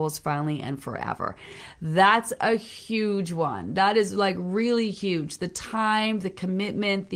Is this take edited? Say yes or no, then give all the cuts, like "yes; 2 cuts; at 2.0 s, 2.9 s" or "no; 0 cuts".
no; 0 cuts